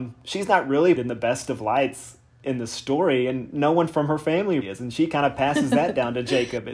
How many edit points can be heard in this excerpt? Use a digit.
3